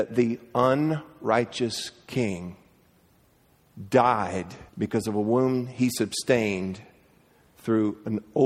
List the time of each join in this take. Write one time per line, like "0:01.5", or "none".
0:04.7